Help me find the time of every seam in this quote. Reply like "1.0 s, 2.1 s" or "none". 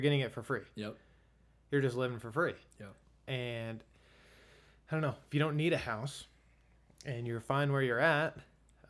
none